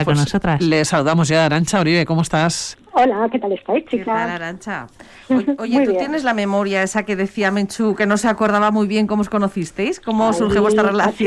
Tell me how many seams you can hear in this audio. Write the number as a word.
zero